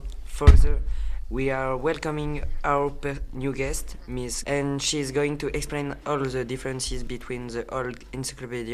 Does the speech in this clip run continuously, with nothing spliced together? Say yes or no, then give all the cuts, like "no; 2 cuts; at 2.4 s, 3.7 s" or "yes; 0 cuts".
no; 1 cut; at 4.4 s